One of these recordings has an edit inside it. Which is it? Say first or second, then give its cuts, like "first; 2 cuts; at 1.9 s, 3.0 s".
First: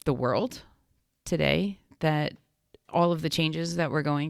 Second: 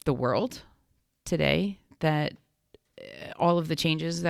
first; 1 cut; at 2.9 s